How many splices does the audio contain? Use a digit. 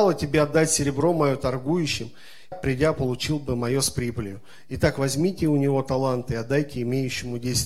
1